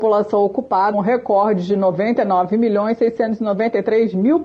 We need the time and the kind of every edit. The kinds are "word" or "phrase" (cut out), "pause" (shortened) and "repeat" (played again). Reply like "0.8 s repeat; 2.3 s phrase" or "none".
0.9 s word